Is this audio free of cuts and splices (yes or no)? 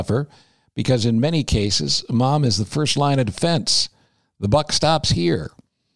yes